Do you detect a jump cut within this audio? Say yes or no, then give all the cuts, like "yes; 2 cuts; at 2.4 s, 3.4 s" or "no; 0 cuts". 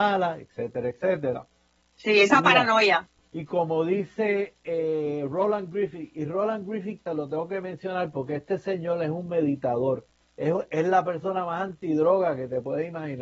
yes; 1 cut; at 3.3 s